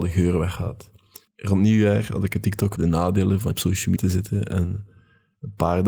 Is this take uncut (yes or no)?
no